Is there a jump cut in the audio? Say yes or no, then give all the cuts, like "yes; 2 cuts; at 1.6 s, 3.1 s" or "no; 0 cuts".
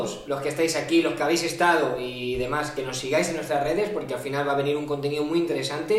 no; 0 cuts